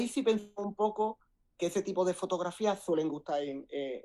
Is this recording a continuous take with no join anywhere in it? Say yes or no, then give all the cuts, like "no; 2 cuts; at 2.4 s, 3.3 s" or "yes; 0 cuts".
yes; 0 cuts